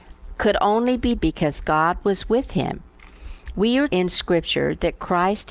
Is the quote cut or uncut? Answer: cut